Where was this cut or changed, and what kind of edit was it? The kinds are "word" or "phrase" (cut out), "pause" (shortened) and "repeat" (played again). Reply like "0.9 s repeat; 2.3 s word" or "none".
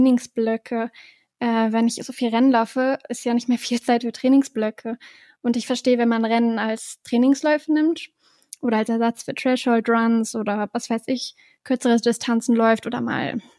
none